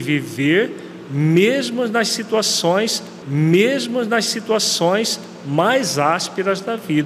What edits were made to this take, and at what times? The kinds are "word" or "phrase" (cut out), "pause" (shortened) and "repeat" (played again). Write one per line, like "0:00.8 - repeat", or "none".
0:03.2 - repeat